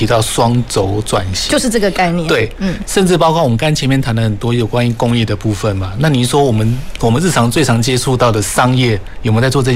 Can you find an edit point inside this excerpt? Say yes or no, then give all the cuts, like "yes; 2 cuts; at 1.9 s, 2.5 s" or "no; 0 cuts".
no; 0 cuts